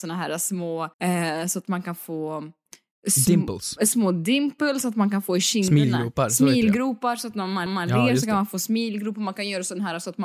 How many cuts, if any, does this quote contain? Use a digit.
2